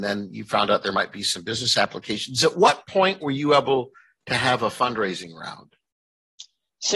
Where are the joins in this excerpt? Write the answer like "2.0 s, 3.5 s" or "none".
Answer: none